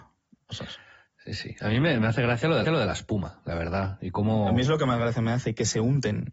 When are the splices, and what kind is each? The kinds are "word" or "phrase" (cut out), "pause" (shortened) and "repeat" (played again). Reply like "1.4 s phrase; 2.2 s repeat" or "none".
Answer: 2.6 s repeat